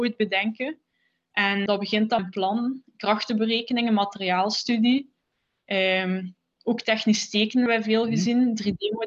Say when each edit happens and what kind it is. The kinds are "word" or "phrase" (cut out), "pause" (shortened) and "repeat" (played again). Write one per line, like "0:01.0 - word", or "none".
0:01.7 - word
0:02.2 - word
0:07.7 - word